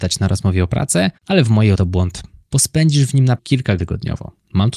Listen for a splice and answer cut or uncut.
cut